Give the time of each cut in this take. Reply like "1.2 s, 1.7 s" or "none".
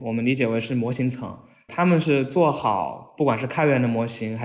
none